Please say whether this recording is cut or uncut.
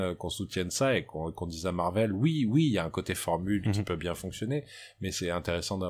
uncut